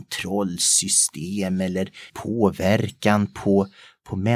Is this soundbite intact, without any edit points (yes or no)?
no